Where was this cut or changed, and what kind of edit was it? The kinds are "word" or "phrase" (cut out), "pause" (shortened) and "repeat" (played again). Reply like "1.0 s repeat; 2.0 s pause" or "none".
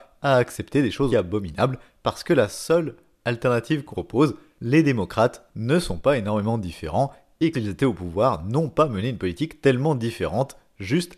1.1 s word; 3.9 s word; 7.5 s word